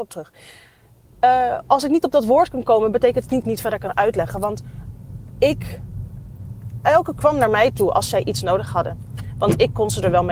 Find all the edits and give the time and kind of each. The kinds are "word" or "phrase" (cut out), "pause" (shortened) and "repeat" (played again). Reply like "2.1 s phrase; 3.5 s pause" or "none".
3.4 s phrase; 7.2 s word